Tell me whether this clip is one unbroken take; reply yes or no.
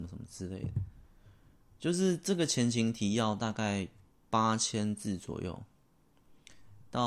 yes